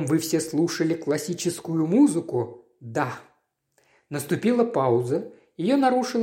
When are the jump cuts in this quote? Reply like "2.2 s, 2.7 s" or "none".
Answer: none